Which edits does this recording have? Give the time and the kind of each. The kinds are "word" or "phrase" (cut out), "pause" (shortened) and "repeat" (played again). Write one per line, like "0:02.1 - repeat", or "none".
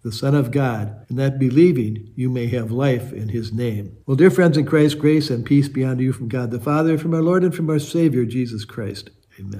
0:01.0 - pause
0:04.0 - pause